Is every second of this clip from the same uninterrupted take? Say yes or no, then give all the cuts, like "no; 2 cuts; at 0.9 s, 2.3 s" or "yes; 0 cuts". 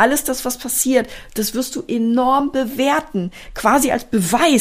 yes; 0 cuts